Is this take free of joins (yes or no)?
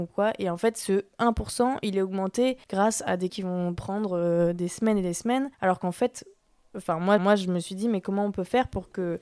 no